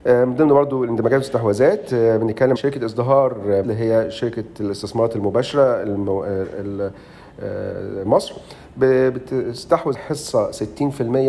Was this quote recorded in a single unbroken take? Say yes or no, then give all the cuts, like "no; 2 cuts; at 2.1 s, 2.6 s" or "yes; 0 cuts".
no; 4 cuts; at 2.5 s, 3.6 s, 8.0 s, 9.9 s